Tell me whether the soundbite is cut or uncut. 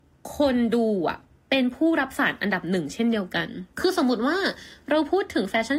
cut